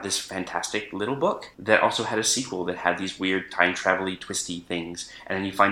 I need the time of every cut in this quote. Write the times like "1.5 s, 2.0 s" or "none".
none

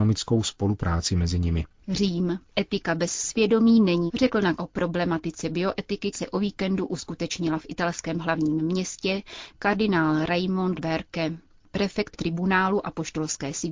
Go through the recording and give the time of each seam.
4.1 s, 4.6 s, 6.1 s, 10.8 s, 12.1 s

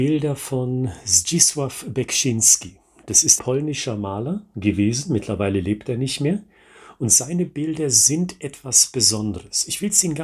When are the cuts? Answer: 3.4 s

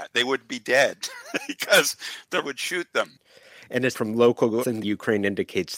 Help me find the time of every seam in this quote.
2.4 s, 3.9 s, 4.6 s

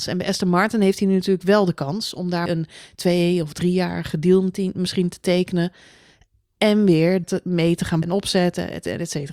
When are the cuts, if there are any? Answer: 2.5 s, 7.2 s, 8.0 s

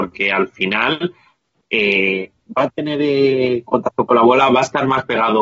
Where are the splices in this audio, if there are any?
none

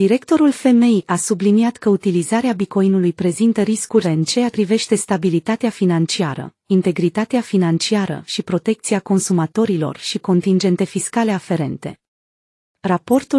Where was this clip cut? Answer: 4.0 s, 4.5 s, 10.2 s

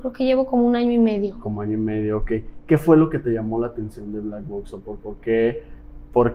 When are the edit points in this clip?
5.0 s

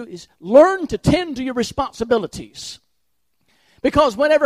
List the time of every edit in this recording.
none

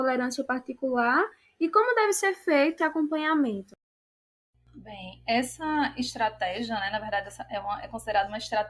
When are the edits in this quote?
2.8 s

